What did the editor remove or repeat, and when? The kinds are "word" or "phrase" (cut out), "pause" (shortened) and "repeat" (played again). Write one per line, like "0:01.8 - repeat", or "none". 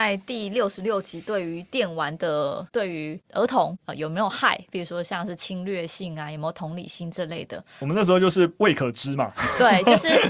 0:08.5 - pause